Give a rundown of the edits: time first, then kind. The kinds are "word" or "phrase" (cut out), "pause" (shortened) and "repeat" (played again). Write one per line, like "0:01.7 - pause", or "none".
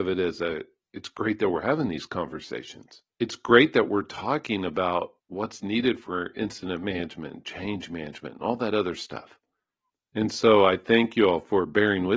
0:03.1 - pause
0:05.2 - pause
0:09.7 - pause